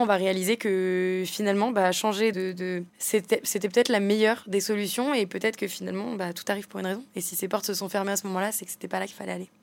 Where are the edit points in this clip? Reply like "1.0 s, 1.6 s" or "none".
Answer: 2.3 s, 2.9 s